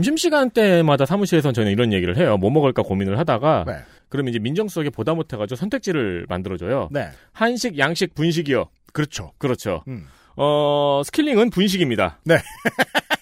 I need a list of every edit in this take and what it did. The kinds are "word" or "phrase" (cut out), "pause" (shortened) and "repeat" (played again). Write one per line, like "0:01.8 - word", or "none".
none